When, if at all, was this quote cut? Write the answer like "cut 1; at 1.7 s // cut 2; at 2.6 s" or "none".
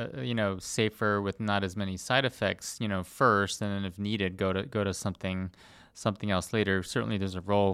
none